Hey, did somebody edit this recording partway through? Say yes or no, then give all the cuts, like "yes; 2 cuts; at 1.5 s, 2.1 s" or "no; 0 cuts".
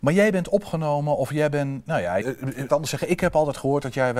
yes; 2 cuts; at 2.2 s, 2.7 s